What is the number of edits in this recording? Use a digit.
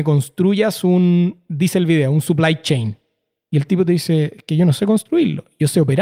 0